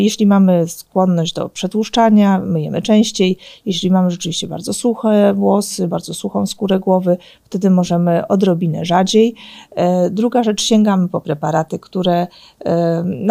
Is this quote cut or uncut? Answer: uncut